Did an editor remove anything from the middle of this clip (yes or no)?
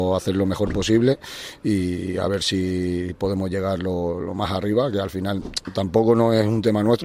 yes